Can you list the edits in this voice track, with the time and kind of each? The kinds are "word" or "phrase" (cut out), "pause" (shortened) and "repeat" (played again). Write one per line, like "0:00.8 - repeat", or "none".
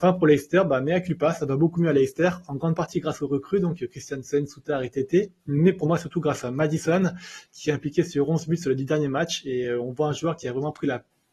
none